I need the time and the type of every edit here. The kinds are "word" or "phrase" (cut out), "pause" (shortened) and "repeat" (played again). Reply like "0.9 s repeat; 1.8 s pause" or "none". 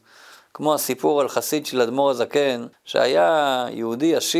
2.7 s pause